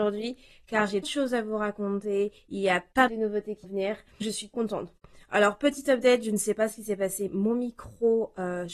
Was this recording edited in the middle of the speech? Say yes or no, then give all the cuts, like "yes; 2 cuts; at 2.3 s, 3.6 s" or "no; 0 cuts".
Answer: yes; 6 cuts; at 1.0 s, 3.1 s, 3.6 s, 4.2 s, 4.5 s, 7.3 s